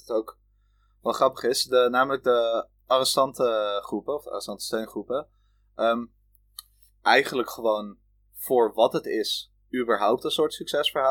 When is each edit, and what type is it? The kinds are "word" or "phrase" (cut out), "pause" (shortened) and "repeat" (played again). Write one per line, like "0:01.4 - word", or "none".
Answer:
none